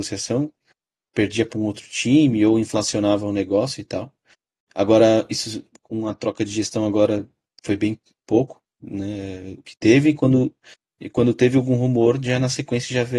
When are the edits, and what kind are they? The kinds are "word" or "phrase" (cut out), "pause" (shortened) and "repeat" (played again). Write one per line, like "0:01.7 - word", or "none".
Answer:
none